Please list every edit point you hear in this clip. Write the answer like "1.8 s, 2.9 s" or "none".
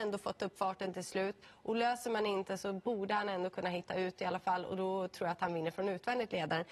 none